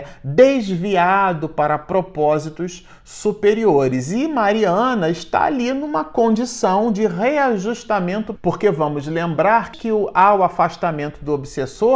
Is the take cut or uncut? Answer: cut